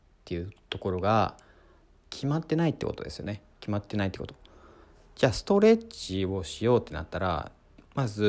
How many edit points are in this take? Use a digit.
1